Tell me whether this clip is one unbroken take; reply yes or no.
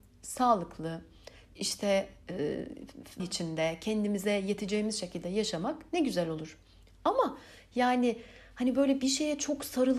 no